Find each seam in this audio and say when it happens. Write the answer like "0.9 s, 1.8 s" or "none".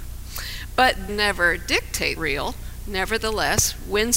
1.1 s, 2.2 s

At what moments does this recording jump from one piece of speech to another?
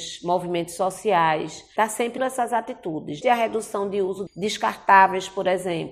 1.8 s, 2.2 s, 3.2 s, 4.3 s

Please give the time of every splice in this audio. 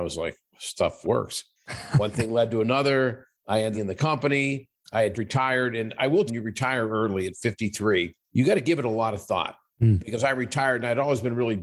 1.0 s, 3.7 s, 5.1 s, 6.3 s, 8.2 s

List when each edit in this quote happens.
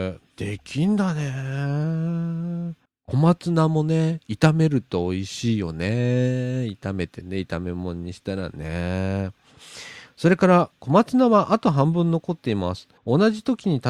2.9 s, 13.0 s

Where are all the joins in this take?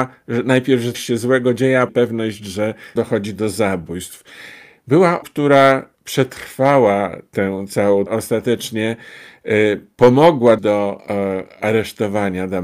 0.9 s, 1.9 s, 3.0 s, 5.2 s, 5.9 s, 8.1 s, 10.6 s

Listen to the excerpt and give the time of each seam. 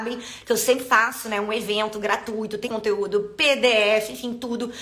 2.6 s

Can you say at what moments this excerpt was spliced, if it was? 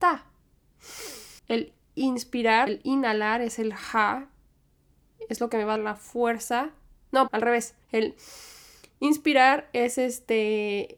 1.4 s, 2.7 s, 5.8 s, 7.3 s, 7.8 s

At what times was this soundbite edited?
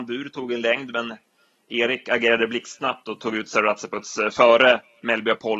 none

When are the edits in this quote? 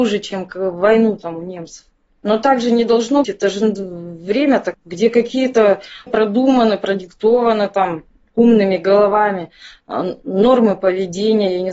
3.2 s, 4.7 s, 6.1 s

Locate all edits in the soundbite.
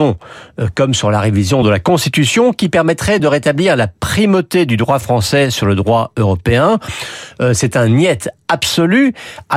none

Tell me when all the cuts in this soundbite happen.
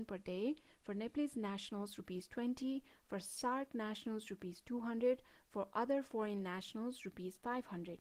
none

